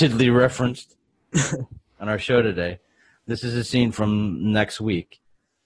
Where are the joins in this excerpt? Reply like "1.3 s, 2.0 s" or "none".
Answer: none